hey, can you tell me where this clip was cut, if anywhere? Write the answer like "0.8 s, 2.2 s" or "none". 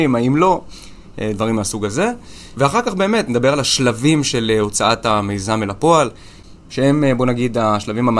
none